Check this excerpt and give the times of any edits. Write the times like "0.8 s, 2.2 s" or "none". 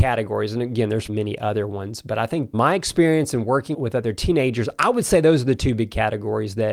1.1 s, 2.5 s, 3.7 s